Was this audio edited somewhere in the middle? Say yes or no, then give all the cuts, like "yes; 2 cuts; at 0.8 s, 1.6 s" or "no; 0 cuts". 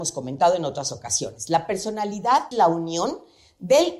yes; 1 cut; at 2.5 s